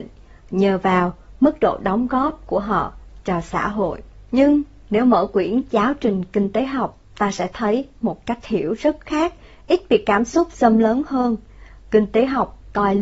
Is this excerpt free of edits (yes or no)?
yes